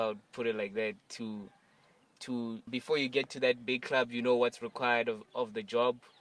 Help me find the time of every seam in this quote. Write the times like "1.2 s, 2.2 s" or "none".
2.7 s, 5.3 s